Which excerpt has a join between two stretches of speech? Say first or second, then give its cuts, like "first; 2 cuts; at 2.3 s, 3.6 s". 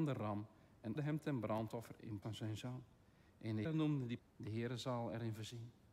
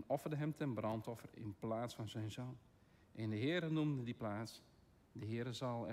first; 4 cuts; at 1.0 s, 2.2 s, 3.6 s, 4.2 s